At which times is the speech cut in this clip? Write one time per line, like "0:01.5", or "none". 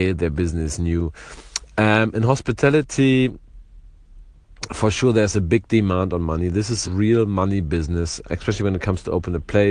0:06.8
0:08.2